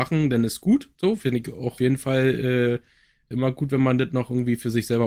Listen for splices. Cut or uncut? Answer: cut